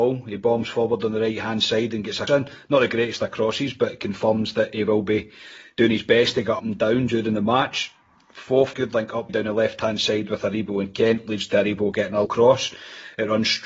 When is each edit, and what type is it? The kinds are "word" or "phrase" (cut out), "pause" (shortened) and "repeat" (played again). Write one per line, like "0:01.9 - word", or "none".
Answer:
0:02.3 - word
0:06.6 - word
0:08.7 - word
0:09.3 - word
0:12.3 - word